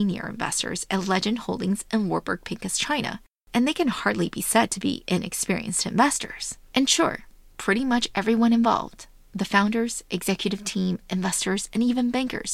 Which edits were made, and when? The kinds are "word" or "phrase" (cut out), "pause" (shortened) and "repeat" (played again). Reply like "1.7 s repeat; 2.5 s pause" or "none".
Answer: none